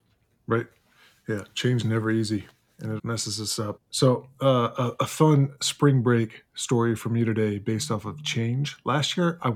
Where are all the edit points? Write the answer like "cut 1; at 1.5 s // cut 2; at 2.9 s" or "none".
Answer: cut 1; at 1.8 s // cut 2; at 3.0 s // cut 3; at 3.8 s